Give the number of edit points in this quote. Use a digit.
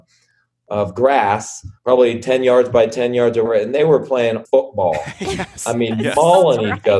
3